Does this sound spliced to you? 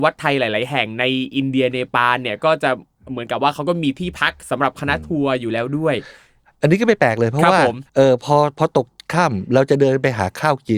yes; 1 cut; at 7.9 s

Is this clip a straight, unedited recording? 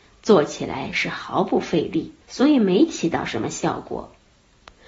no; 1 cut; at 2.2 s

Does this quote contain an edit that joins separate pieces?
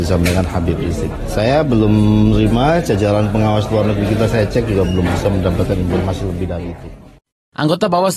no; 0 cuts

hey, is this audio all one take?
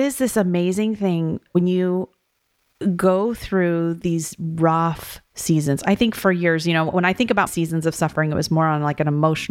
no; 1 cut; at 7.5 s

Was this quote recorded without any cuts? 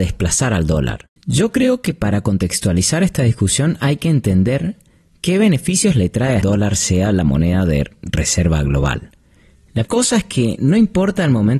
no; 3 cuts; at 1.2 s, 6.4 s, 9.8 s

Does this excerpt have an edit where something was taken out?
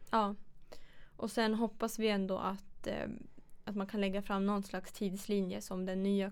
no; 0 cuts

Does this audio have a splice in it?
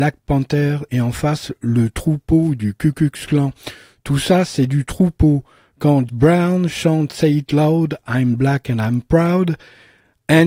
yes; 1 cut; at 6.1 s

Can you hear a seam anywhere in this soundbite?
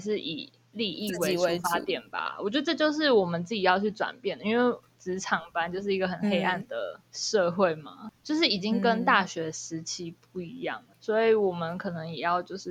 yes; 1 cut; at 7.1 s

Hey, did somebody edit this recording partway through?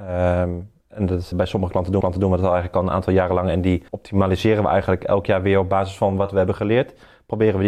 yes; 3 cuts; at 1.3 s, 2.0 s, 3.9 s

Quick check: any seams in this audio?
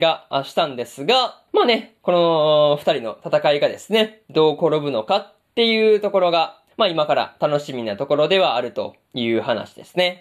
yes; 3 cuts; at 1.5 s, 6.7 s, 9.0 s

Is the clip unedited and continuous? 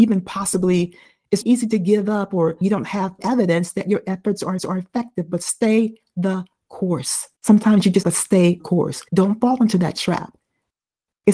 no; 8 cuts; at 1.4 s, 2.6 s, 3.2 s, 4.6 s, 7.4 s, 8.0 s, 8.6 s, 9.1 s

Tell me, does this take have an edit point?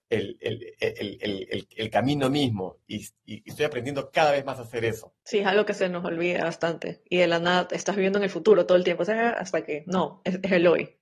yes; 2 cuts; at 2.8 s, 5.2 s

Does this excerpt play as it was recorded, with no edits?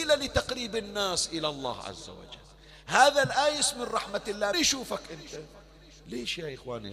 no; 1 cut; at 4.5 s

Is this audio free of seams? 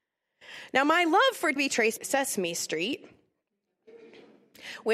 no; 2 cuts; at 1.6 s, 2.0 s

